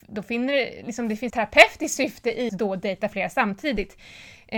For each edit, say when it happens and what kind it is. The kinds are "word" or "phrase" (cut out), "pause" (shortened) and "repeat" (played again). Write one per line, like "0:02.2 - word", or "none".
0:01.3 - word
0:02.5 - word